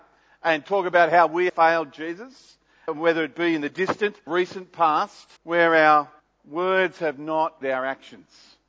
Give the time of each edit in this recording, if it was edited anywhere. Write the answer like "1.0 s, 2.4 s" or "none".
1.5 s, 2.9 s, 4.3 s, 5.4 s, 6.2 s, 7.6 s